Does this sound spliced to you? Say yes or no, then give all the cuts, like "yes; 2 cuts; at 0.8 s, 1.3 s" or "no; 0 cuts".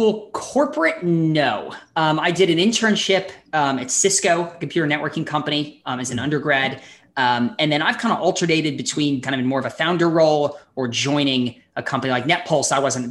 yes; 1 cut; at 9.2 s